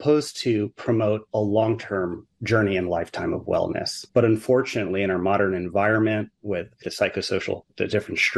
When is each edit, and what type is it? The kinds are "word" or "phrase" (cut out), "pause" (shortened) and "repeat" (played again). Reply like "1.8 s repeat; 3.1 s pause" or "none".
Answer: 4.1 s pause; 6.8 s phrase

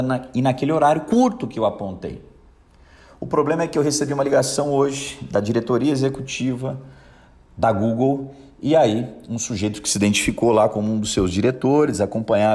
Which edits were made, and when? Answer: none

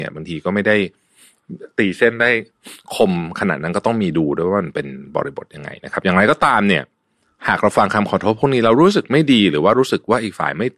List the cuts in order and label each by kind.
none

